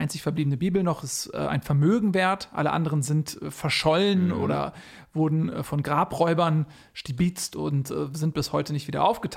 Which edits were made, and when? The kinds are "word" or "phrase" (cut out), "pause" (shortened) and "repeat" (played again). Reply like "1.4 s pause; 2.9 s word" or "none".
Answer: none